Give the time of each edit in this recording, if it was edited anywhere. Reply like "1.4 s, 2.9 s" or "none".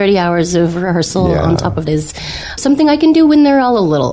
1.9 s, 2.6 s